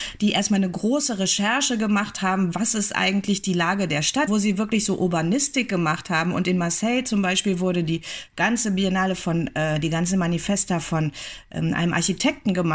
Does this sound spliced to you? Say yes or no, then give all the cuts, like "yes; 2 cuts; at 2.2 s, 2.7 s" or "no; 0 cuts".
yes; 1 cut; at 4.3 s